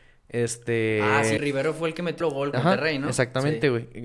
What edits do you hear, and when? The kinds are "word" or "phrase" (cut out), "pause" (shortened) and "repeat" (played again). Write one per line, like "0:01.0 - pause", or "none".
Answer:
0:01.4 - word
0:02.2 - word
0:02.5 - word